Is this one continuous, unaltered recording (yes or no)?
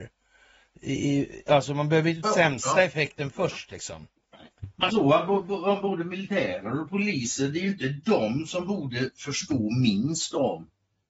no